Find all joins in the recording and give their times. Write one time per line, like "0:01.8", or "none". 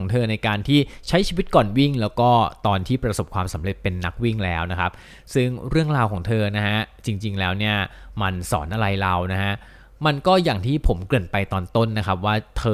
none